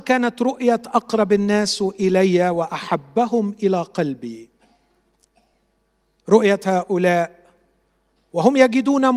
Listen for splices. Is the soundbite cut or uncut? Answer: uncut